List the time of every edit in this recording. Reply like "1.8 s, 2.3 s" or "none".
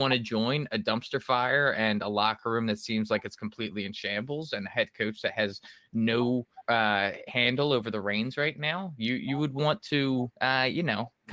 6.6 s, 10.3 s